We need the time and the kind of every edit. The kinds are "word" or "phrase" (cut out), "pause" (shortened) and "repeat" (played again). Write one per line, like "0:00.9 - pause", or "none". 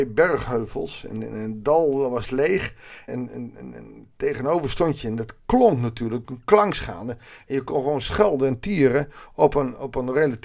0:03.1 - word